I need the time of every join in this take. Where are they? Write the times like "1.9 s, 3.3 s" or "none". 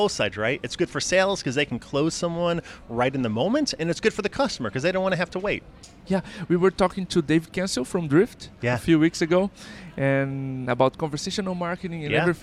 none

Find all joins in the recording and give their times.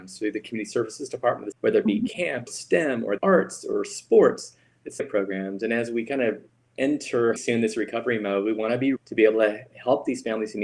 1.5 s, 2.5 s, 3.2 s, 5.0 s, 7.4 s, 9.0 s

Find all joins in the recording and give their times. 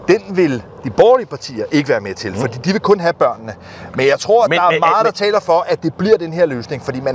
none

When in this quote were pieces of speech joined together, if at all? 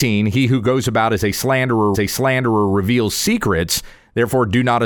1.9 s

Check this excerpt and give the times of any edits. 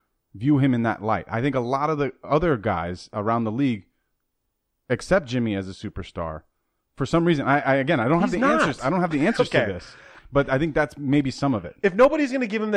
none

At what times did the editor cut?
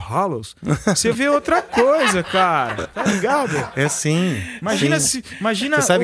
1.1 s

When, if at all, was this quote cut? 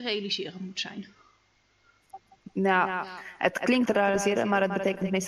3.8 s

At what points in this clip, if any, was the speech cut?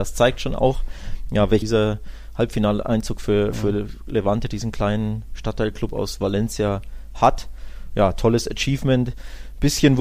1.6 s

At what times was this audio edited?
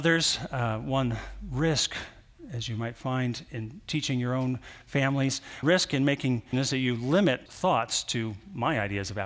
5.6 s, 6.5 s, 7.5 s

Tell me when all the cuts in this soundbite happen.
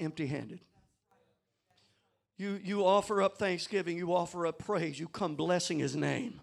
none

